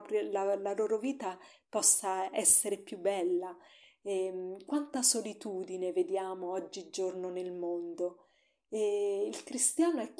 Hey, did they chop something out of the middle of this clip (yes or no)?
no